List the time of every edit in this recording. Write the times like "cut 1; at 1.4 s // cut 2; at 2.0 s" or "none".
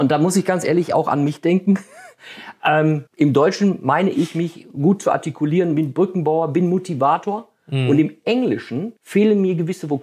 cut 1; at 3.1 s // cut 2; at 9.0 s